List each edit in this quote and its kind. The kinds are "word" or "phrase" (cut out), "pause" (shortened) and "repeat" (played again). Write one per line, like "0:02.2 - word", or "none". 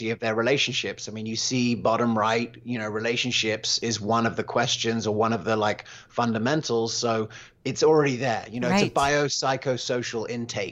none